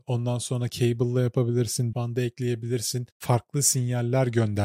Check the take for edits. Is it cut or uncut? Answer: cut